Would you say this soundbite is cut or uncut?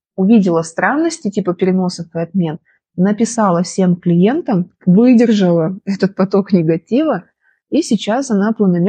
uncut